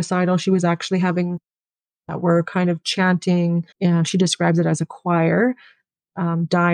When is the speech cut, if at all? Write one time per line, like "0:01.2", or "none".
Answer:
0:01.8
0:03.7

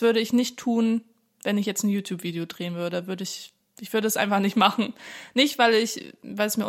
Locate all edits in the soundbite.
none

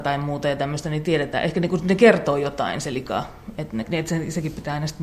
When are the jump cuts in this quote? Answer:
0:03.8

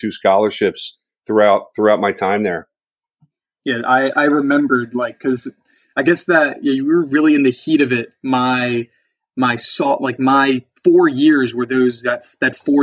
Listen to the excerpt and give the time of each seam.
none

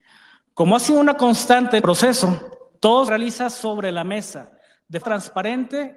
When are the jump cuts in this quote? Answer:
0:01.8
0:03.1
0:05.0

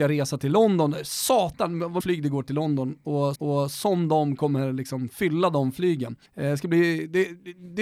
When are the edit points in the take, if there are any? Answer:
0:02.0
0:03.3
0:06.3

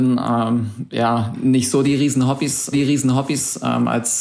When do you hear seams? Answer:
0:02.7

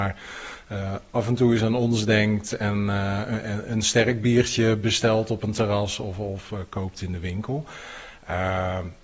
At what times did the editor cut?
none

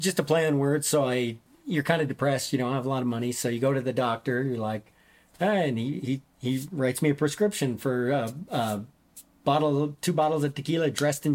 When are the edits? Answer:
none

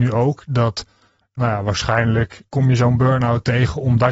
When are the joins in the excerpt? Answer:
0:01.4
0:02.5

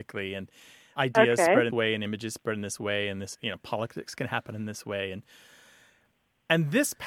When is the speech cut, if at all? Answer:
0:01.0
0:01.7
0:03.3

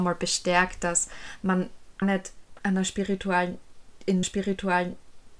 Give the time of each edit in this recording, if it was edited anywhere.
0:02.0
0:02.6
0:04.2

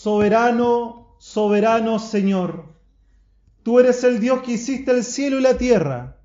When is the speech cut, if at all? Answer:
none

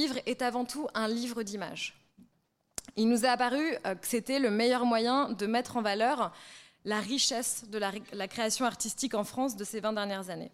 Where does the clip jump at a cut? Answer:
none

